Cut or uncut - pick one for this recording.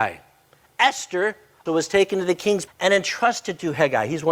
cut